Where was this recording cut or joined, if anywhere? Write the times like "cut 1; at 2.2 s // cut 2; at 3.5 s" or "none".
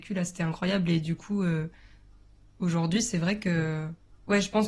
none